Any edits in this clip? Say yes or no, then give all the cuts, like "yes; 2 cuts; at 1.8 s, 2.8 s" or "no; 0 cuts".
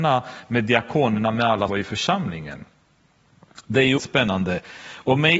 yes; 2 cuts; at 1.7 s, 4.0 s